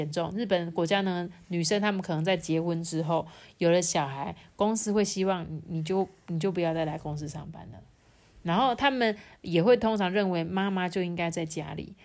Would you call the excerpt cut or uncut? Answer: uncut